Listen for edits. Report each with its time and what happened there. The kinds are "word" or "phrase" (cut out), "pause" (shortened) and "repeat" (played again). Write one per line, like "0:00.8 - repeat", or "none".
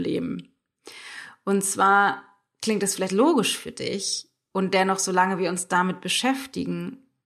0:03.1 - phrase

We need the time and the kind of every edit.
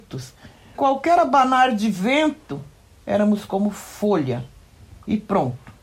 none

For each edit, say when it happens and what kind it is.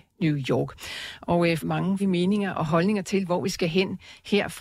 0:01.6 - phrase
0:02.0 - word

